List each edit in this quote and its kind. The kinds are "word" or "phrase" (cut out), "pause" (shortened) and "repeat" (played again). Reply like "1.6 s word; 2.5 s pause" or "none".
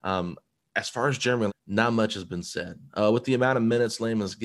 1.5 s phrase